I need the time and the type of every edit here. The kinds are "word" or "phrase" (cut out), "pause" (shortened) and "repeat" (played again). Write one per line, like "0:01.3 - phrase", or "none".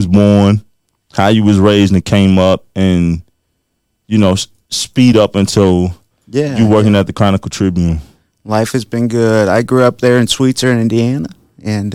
none